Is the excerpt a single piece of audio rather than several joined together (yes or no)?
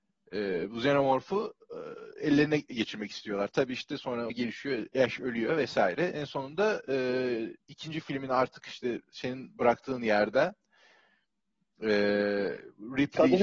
no